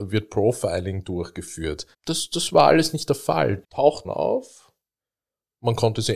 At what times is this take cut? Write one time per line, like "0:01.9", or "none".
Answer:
0:01.9
0:03.6
0:04.0